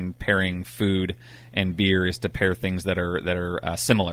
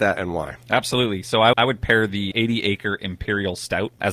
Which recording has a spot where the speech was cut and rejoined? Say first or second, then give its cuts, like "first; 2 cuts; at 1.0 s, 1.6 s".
second; 2 cuts; at 1.5 s, 2.3 s